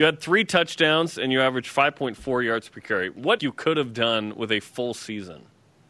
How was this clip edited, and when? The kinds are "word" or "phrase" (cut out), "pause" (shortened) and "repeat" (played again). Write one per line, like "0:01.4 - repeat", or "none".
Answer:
0:03.4 - phrase